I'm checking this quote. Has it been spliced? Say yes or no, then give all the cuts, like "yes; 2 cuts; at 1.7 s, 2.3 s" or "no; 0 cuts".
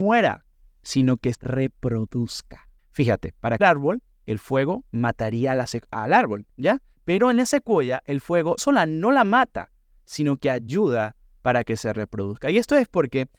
yes; 4 cuts; at 1.3 s, 3.6 s, 5.9 s, 8.6 s